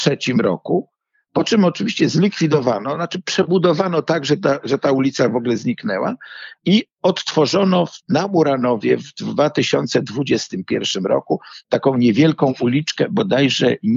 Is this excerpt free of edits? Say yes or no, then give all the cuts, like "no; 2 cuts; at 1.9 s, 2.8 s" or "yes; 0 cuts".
yes; 0 cuts